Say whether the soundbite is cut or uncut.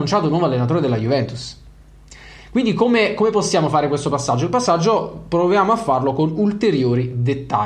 uncut